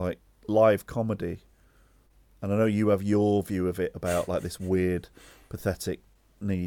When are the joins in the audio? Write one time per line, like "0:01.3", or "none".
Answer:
none

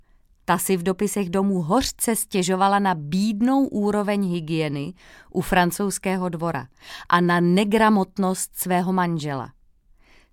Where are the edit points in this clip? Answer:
none

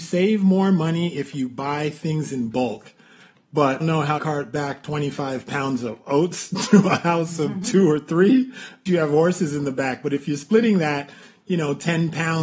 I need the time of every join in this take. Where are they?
0:03.8
0:04.2
0:08.9

